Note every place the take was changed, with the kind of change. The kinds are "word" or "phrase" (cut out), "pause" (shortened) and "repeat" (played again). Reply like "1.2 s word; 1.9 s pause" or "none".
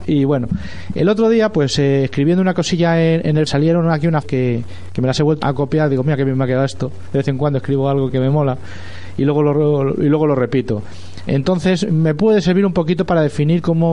3.5 s phrase; 4.2 s word; 5.4 s word; 8.1 s word